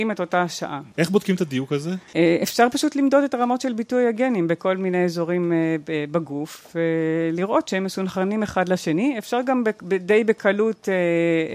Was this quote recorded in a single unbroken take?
no; 1 cut; at 2.1 s

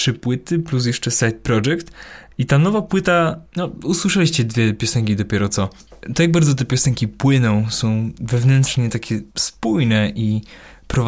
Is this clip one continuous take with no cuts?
no; 1 cut; at 9.3 s

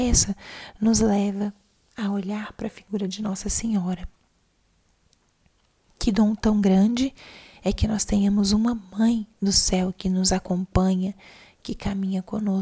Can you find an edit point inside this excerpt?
no; 0 cuts

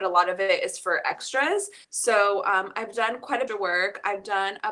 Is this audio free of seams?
no; 2 cuts; at 1.8 s, 3.5 s

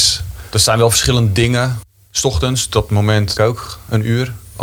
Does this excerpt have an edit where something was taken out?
yes; 1 cut; at 3.4 s

